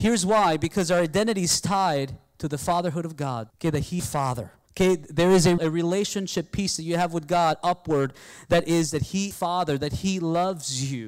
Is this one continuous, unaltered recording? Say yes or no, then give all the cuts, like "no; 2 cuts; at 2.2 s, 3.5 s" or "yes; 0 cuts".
no; 5 cuts; at 3.5 s, 4.0 s, 4.7 s, 5.6 s, 9.3 s